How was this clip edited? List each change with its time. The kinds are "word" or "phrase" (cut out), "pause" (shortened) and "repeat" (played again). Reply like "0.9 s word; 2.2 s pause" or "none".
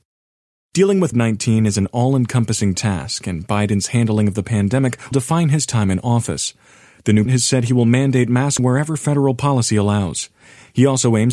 1.1 s word; 5.1 s word; 7.3 s word; 8.6 s word